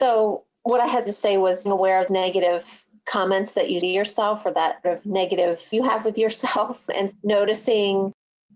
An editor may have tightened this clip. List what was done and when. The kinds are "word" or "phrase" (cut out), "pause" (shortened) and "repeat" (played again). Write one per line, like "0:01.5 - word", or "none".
0:01.1 - word
0:01.6 - word
0:02.1 - word
0:03.8 - word
0:04.8 - word
0:05.7 - word
0:07.1 - word